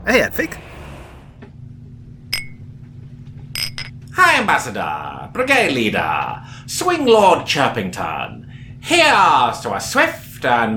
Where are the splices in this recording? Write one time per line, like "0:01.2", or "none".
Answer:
none